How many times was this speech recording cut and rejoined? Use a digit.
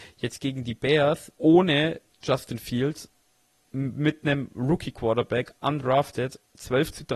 1